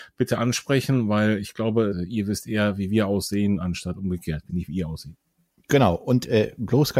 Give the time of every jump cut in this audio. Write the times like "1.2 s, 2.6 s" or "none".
1.9 s, 4.5 s

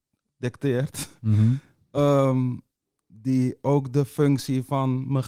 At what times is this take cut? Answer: none

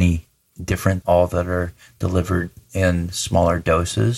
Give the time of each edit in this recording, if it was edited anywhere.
1.0 s

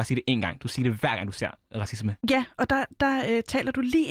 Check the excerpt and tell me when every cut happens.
2.2 s

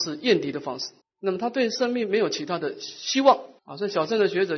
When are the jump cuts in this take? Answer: 1.0 s, 3.6 s

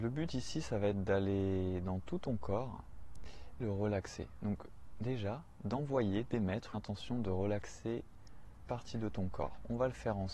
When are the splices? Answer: 3.6 s, 6.7 s, 8.6 s

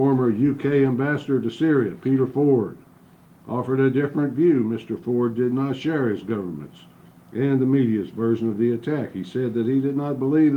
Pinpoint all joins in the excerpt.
none

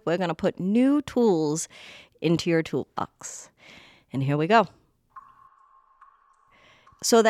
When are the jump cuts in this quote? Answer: none

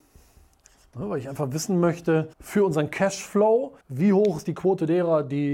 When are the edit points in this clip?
2.3 s, 3.8 s

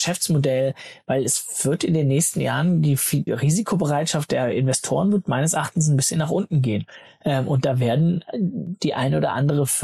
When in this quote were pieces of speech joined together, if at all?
3.3 s

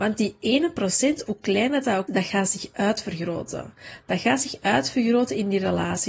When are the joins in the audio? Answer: 2.1 s

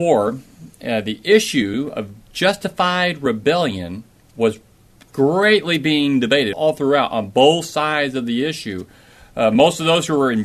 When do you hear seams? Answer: 6.5 s

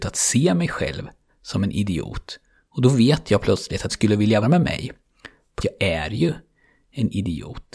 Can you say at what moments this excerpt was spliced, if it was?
1.3 s, 3.9 s, 4.4 s, 5.6 s

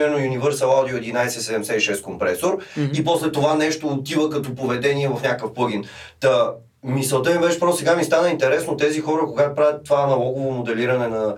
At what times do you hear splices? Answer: none

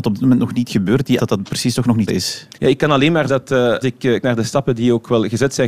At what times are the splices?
1.2 s, 2.1 s, 2.5 s, 3.3 s, 3.8 s, 4.2 s

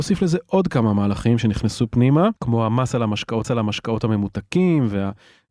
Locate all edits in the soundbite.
2.4 s, 3.4 s

